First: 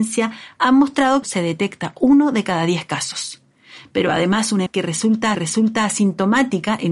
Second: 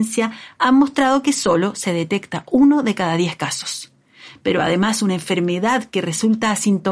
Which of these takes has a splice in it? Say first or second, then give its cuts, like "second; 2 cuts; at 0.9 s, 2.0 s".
first; 3 cuts; at 1.2 s, 4.7 s, 5.3 s